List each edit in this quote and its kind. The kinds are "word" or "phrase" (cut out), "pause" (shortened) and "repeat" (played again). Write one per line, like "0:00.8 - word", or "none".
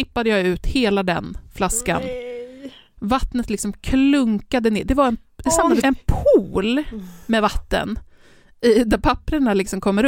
0:05.8 - word